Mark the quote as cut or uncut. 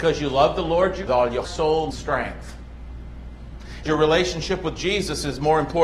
cut